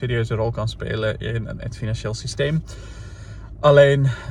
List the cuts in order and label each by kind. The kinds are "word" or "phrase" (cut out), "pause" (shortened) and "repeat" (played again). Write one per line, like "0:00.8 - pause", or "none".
none